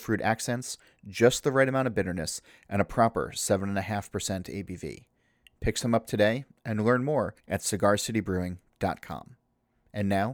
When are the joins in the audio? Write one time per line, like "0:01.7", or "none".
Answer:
0:07.4